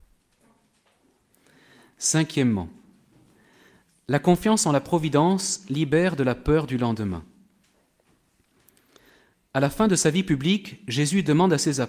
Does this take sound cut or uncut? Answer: uncut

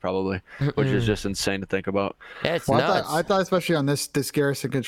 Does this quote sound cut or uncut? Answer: uncut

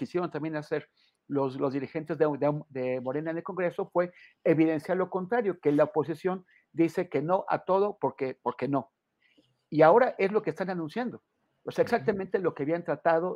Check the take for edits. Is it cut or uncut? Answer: uncut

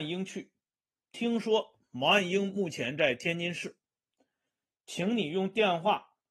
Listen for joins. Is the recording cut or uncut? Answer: uncut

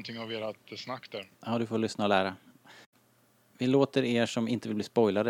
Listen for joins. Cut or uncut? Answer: uncut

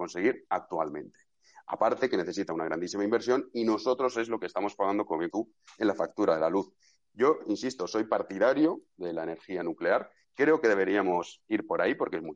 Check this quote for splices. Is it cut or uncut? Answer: cut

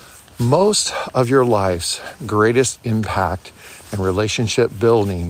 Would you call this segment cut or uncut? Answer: uncut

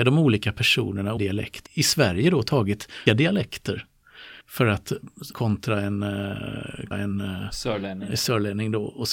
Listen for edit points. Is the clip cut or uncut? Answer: cut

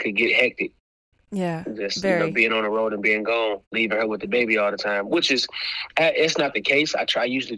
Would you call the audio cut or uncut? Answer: cut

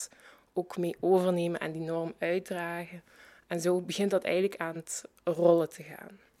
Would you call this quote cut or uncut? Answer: uncut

